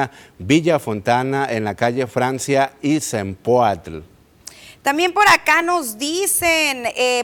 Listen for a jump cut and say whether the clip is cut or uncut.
uncut